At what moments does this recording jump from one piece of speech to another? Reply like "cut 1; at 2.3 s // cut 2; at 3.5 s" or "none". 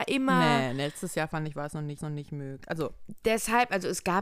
cut 1; at 2.0 s